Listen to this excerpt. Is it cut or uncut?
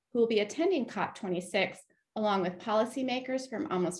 uncut